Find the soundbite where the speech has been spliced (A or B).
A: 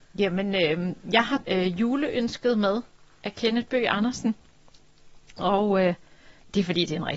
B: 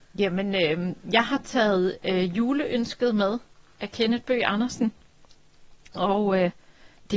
A